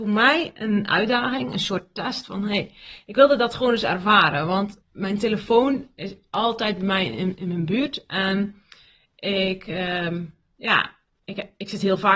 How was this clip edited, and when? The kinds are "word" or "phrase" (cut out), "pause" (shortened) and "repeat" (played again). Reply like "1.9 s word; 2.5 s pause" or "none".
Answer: 4.8 s pause